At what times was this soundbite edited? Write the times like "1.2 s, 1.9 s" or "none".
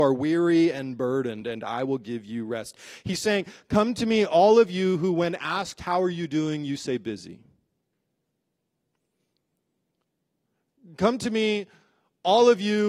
none